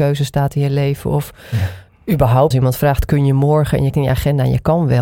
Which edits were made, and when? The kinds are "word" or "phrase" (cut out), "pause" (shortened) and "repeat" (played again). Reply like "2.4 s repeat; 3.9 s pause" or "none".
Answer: 2.5 s word; 3.9 s word